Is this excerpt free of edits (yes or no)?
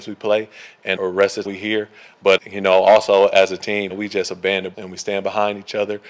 no